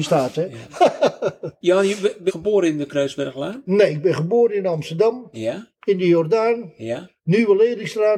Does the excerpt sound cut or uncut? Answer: cut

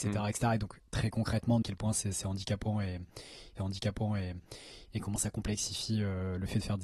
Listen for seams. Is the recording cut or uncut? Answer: cut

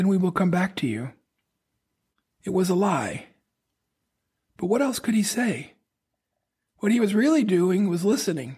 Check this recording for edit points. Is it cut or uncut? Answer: uncut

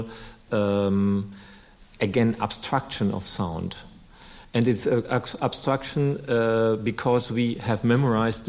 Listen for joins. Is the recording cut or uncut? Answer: uncut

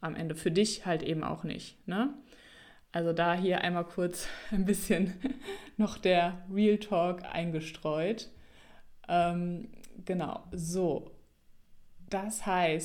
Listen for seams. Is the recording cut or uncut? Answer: uncut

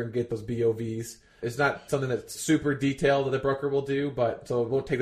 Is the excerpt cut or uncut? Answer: uncut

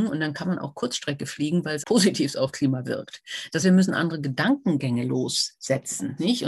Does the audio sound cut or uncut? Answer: cut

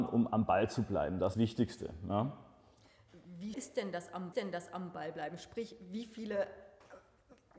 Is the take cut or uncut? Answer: cut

